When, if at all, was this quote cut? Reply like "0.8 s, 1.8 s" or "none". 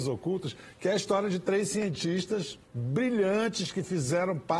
2.6 s